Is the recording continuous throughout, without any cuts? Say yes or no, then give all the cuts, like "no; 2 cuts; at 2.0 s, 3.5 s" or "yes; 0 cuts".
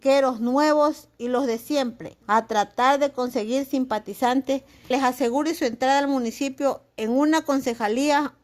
no; 2 cuts; at 2.2 s, 4.9 s